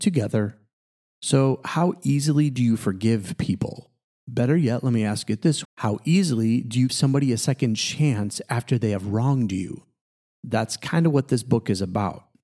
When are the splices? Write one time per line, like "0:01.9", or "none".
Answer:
0:05.6
0:06.9